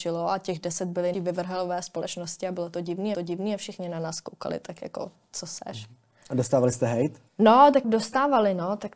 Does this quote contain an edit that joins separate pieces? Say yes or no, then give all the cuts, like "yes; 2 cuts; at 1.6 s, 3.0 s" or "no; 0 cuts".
yes; 4 cuts; at 1.1 s, 3.1 s, 7.3 s, 7.8 s